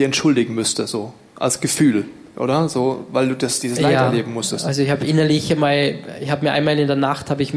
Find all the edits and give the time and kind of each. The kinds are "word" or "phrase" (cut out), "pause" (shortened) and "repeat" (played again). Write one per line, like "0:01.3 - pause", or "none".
none